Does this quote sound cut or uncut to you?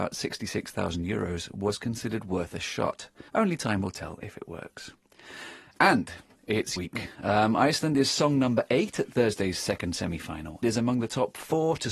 cut